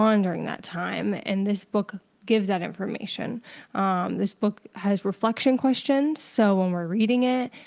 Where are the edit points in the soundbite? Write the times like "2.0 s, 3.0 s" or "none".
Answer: none